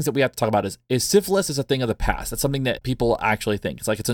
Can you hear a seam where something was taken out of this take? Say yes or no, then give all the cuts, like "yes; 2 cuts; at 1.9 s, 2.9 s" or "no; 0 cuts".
no; 0 cuts